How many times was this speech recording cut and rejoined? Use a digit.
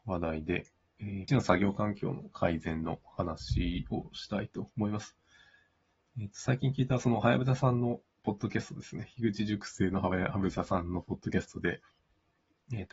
1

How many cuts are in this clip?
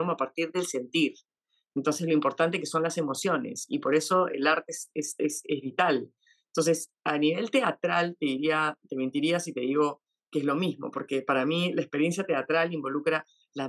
0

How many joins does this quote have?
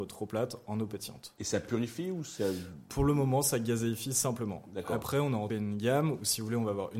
1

